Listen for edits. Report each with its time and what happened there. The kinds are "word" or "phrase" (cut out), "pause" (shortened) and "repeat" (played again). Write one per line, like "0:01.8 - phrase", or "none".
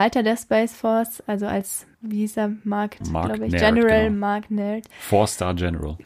0:01.9 - pause
0:03.0 - word